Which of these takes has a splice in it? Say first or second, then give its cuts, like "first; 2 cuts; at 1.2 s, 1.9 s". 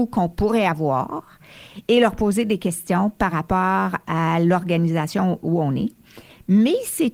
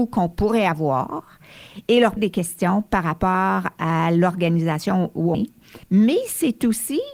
second; 3 cuts; at 2.2 s, 5.3 s, 5.8 s